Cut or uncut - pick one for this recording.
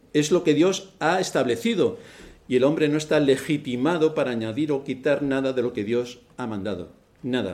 uncut